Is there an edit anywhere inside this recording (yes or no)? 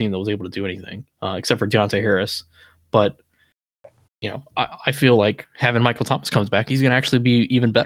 yes